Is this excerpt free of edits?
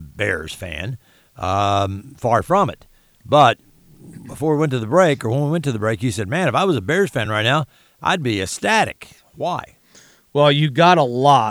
yes; 0 cuts

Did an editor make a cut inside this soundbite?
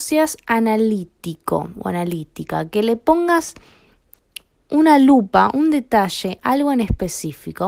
no; 0 cuts

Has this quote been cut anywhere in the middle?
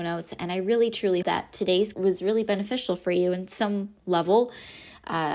yes; 3 cuts; at 1.2 s, 1.9 s, 4.0 s

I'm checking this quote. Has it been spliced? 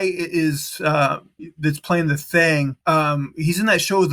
yes; 1 cut; at 2.8 s

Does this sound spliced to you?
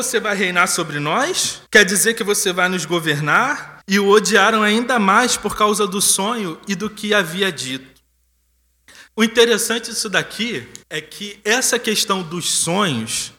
yes; 4 cuts; at 1.7 s, 3.8 s, 9.1 s, 10.8 s

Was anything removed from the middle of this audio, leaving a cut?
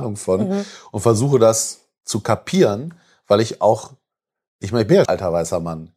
yes; 1 cut; at 5.0 s

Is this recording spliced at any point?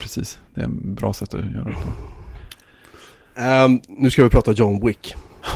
no; 0 cuts

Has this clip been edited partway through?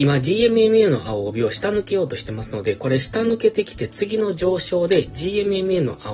no; 0 cuts

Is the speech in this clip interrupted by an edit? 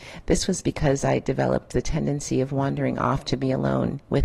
no; 0 cuts

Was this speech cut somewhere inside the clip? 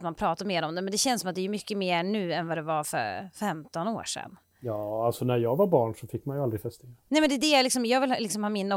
no; 0 cuts

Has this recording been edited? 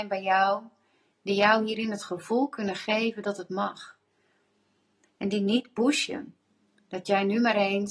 no; 0 cuts

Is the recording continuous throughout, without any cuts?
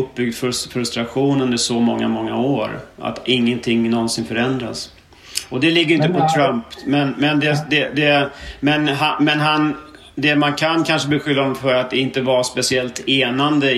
yes; 0 cuts

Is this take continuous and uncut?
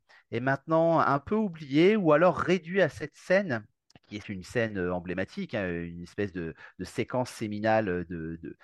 no; 2 cuts; at 3.8 s, 4.2 s

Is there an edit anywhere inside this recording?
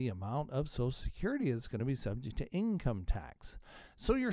no; 0 cuts

